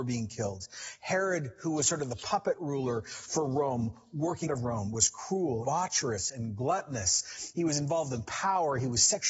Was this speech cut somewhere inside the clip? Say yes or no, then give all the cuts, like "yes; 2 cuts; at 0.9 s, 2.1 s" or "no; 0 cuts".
yes; 2 cuts; at 4.5 s, 5.6 s